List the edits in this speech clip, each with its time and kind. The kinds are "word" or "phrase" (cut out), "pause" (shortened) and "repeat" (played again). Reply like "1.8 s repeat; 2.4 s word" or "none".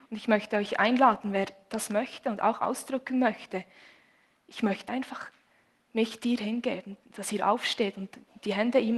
4.9 s word